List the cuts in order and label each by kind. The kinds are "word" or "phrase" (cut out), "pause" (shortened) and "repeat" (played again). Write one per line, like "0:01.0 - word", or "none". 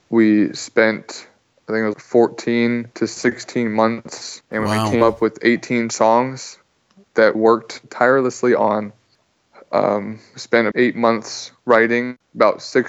0:01.9 - word
0:04.4 - word
0:07.3 - word
0:10.7 - word

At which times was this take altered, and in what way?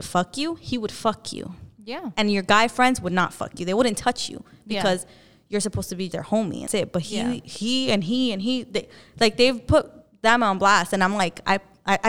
0:06.1 - word
0:06.7 - word

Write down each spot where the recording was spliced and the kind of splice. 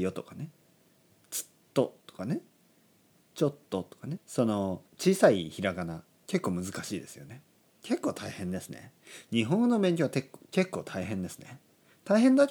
0:04.2 - word
0:04.9 - pause

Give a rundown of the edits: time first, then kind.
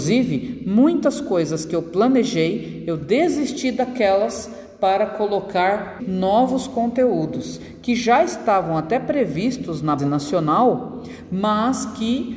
0:06.0 - word
0:10.0 - word

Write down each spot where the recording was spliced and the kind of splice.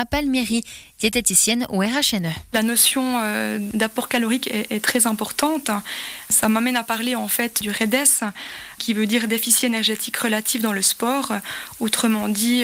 none

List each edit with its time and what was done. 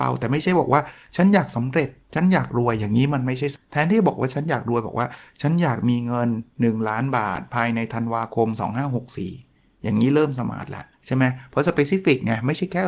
0:02.0 - pause
0:03.6 - phrase
0:10.9 - pause

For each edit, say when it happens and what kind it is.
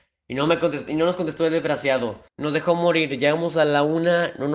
0:02.3 - pause

